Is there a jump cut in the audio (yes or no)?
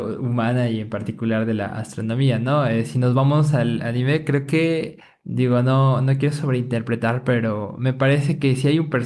no